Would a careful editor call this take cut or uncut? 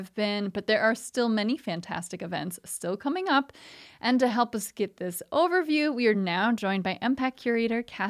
uncut